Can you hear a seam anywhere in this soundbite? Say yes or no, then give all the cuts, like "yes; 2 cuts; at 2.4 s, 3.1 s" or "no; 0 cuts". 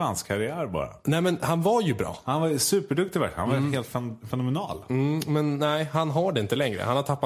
no; 0 cuts